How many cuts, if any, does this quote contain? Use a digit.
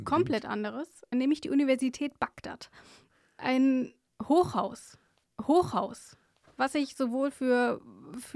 2